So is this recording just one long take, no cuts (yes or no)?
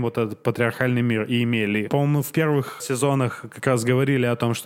no